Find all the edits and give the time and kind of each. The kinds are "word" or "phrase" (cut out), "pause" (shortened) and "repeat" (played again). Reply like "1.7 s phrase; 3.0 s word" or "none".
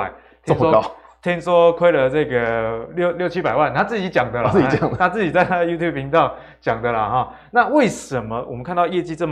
none